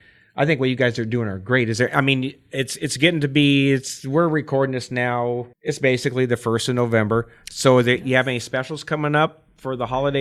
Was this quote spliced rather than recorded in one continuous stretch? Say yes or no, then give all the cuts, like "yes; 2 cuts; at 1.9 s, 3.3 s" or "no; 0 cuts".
yes; 1 cut; at 5.5 s